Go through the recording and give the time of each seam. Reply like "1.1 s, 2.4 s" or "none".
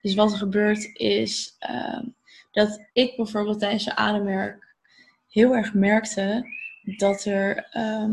2.9 s